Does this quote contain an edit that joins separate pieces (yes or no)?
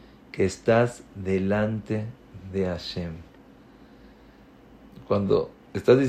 no